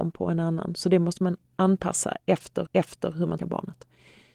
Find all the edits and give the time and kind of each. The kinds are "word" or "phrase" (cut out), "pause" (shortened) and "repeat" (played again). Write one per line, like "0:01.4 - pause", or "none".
0:01.4 - pause
0:02.7 - repeat
0:03.4 - word